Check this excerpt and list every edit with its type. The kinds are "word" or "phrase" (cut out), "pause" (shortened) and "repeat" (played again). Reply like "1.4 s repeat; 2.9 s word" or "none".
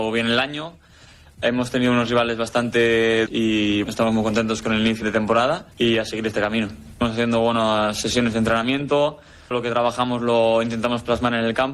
3.3 s phrase; 3.8 s word; 5.0 s word; 5.7 s pause; 9.5 s word